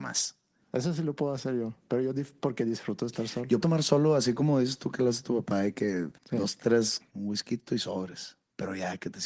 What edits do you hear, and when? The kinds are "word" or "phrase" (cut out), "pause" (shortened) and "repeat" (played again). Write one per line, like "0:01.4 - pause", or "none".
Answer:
0:03.6 - word
0:06.2 - pause
0:07.0 - phrase